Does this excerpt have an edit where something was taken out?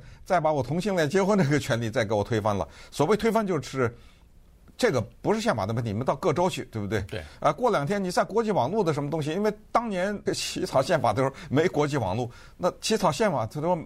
yes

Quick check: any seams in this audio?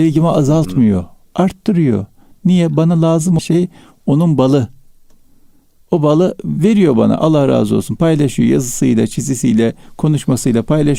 yes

